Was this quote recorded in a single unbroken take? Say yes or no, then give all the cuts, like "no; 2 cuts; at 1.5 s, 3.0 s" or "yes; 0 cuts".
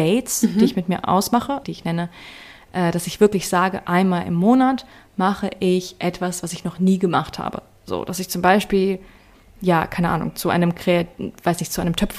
no; 1 cut; at 1.6 s